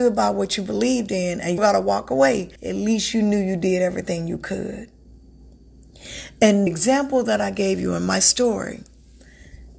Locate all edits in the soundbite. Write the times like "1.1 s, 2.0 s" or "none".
1.6 s, 2.6 s, 6.7 s